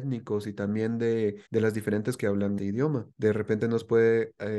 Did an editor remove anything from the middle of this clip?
yes; 5 cuts; at 1.5 s, 2.2 s, 2.6 s, 3.1 s, 3.6 s

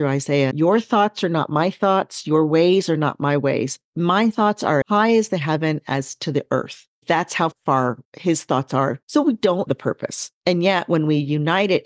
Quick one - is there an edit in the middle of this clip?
yes; 6 cuts; at 3.9 s, 4.8 s, 8.0 s, 9.0 s, 9.7 s, 10.4 s

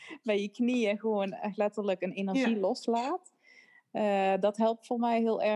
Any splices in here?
no; 0 cuts

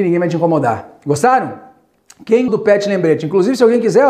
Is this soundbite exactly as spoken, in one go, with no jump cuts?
no; 1 cut; at 2.5 s

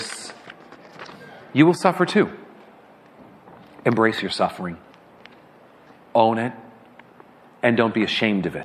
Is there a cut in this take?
no; 0 cuts

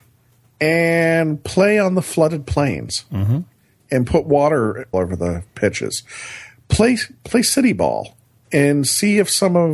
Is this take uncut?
no; 1 cut; at 4.9 s

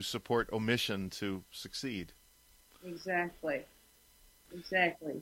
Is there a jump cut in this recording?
no; 0 cuts

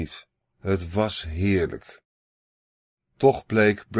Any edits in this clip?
no; 0 cuts

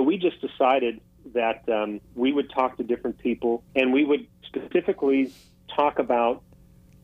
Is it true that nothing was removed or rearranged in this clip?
no; 3 cuts; at 2.0 s, 3.7 s, 4.3 s

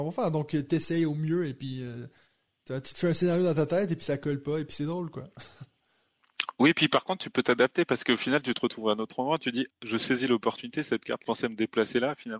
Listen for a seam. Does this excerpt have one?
yes; 2 cuts; at 9.7 s, 11.2 s

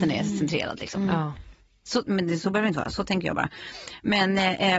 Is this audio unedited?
yes; 0 cuts

